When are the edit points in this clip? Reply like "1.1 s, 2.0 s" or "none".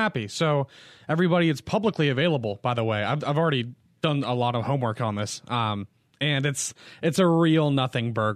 none